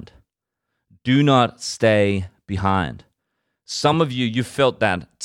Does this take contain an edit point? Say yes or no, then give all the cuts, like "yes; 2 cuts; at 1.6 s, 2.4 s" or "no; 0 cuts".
no; 0 cuts